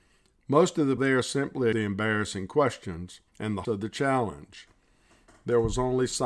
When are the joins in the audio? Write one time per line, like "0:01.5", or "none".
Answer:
0:01.0
0:01.7
0:03.3
0:03.6